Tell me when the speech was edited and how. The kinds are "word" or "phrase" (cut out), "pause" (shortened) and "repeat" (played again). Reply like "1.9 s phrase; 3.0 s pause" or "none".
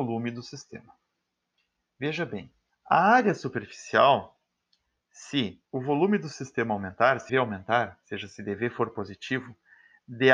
2.7 s pause; 5.6 s pause; 7.3 s word